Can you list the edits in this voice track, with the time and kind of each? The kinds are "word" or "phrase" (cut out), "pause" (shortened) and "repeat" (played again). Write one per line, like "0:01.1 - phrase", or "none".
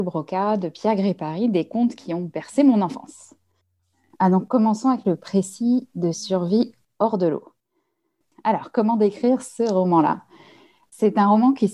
none